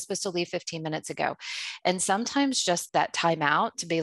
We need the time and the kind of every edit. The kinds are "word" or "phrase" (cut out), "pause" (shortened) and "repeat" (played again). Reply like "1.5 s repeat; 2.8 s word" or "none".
2.9 s word